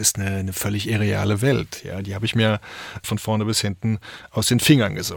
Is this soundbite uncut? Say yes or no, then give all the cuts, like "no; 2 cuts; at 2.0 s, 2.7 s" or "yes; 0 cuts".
no; 1 cut; at 3.0 s